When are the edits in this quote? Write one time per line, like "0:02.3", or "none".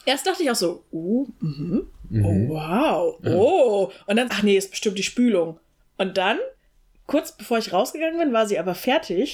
0:04.3